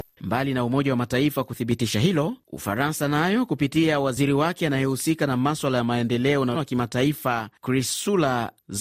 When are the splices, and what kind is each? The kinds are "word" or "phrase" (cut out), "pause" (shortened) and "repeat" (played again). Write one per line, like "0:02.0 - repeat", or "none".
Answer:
0:06.5 - word